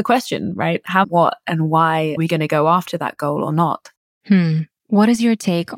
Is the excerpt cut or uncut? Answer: cut